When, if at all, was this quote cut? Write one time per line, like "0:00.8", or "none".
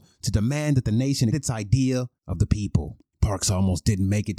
0:01.3
0:02.2
0:03.1